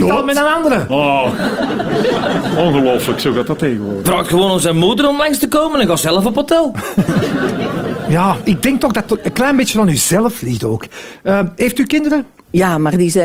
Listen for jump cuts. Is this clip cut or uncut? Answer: uncut